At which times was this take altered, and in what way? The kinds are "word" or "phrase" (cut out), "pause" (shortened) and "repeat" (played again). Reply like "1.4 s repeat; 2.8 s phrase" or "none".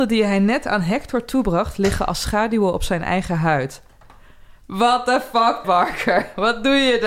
5.6 s word